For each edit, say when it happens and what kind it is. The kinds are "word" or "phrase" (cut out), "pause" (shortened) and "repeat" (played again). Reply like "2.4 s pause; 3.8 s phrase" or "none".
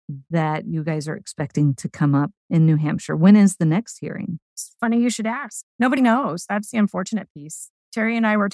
4.4 s pause; 6.0 s word